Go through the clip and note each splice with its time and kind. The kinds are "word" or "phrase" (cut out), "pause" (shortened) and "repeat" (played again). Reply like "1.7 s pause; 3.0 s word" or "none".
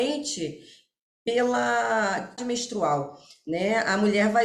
2.4 s word